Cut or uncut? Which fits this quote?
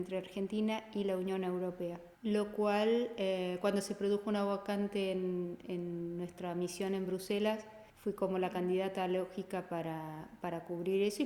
cut